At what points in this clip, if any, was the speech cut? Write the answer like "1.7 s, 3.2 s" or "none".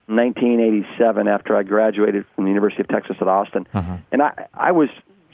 4.0 s